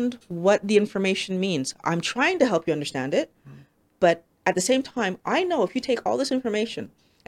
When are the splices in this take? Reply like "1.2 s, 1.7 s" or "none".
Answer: none